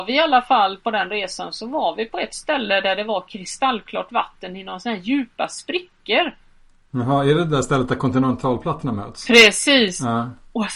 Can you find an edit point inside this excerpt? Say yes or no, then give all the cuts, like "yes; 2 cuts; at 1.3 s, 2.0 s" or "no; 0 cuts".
no; 0 cuts